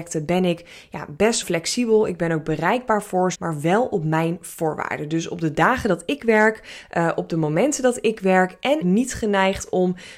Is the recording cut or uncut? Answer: cut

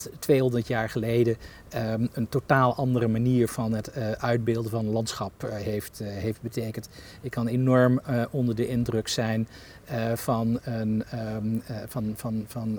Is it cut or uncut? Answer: uncut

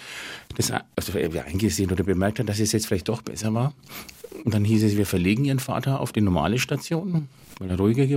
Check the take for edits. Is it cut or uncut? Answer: uncut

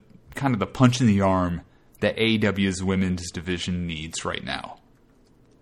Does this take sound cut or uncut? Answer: uncut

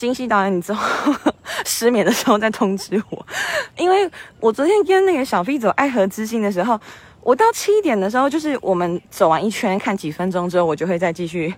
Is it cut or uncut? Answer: cut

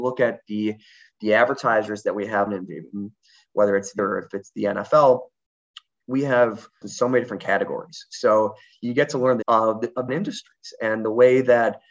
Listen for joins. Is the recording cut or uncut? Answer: cut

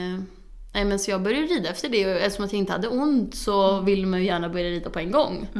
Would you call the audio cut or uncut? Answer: uncut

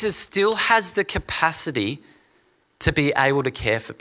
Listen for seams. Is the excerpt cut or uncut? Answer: uncut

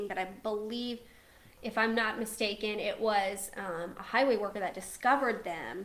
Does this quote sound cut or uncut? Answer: uncut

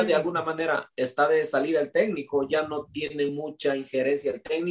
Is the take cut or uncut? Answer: uncut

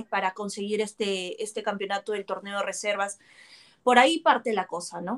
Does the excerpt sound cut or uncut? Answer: uncut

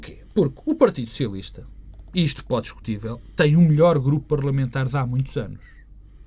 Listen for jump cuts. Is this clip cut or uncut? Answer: cut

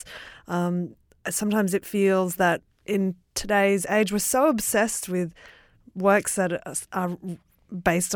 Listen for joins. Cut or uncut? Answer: uncut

